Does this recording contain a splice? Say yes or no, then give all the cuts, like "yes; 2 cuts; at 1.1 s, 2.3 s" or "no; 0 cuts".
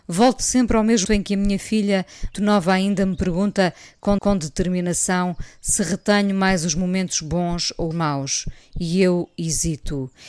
yes; 4 cuts; at 1.0 s, 2.3 s, 4.2 s, 7.9 s